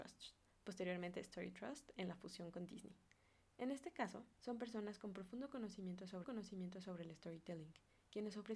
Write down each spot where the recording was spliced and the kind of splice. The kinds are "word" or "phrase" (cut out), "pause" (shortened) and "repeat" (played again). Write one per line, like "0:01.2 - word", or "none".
0:04.3 - pause
0:06.2 - repeat